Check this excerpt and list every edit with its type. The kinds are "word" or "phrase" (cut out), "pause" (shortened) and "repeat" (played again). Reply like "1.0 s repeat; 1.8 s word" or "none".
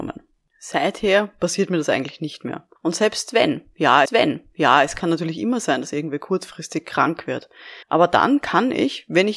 2.8 s pause; 4.1 s repeat; 7.8 s pause